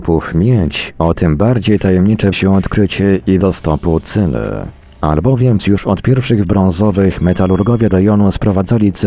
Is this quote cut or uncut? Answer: cut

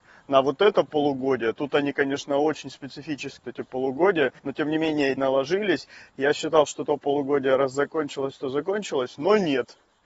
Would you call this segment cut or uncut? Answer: cut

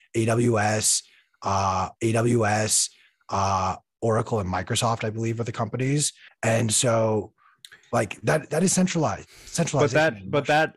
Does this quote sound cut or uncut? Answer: cut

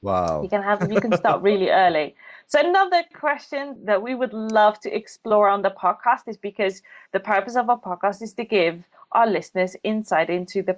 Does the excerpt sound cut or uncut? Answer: uncut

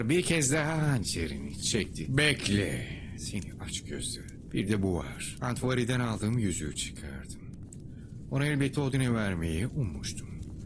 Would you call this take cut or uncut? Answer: uncut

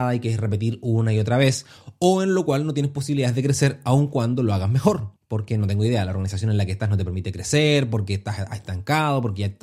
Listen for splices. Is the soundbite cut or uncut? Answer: cut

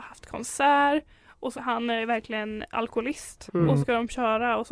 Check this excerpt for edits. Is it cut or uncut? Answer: cut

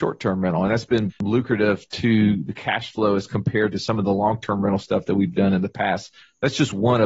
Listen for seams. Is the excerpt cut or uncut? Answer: cut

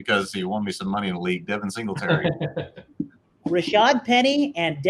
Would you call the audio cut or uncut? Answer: uncut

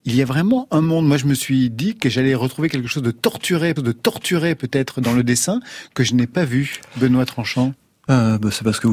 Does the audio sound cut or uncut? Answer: cut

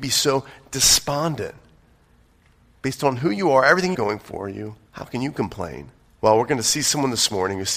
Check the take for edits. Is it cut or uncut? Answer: cut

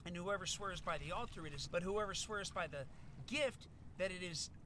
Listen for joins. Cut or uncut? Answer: cut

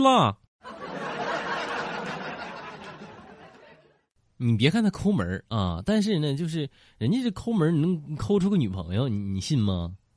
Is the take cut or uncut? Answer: uncut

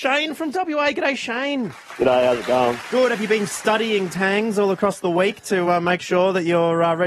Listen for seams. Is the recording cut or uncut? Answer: uncut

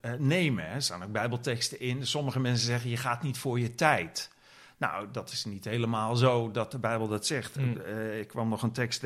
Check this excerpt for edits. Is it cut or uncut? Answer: uncut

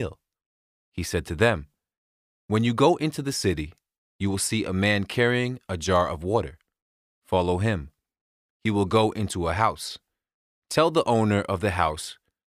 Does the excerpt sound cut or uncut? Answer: uncut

